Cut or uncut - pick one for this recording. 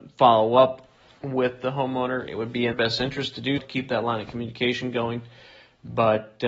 cut